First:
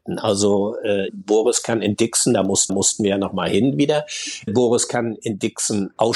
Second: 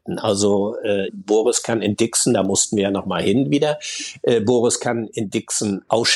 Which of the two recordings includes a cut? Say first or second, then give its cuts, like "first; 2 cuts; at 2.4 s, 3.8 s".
first; 2 cuts; at 2.7 s, 4.5 s